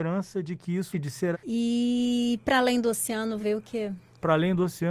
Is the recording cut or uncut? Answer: cut